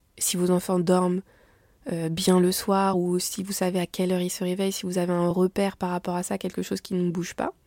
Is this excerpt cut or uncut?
uncut